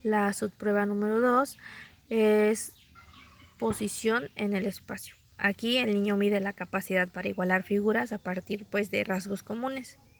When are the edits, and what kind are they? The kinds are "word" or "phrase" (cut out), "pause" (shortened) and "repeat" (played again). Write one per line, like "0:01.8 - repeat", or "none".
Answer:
none